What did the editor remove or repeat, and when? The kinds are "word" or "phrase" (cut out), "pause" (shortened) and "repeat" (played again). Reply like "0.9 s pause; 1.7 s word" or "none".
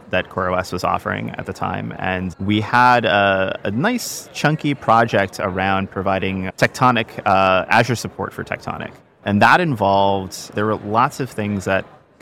9.0 s pause; 10.5 s word